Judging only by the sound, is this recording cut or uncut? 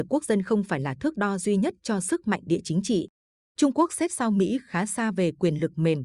uncut